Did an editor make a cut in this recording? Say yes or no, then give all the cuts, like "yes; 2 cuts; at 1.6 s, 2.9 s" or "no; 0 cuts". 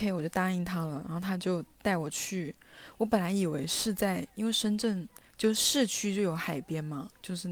yes; 2 cuts; at 1.7 s, 5.3 s